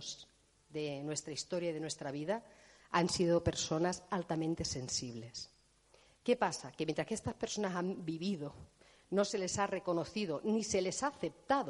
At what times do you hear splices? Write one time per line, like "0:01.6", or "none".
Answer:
none